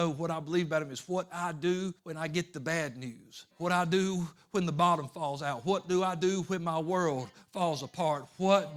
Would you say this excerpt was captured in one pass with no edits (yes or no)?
no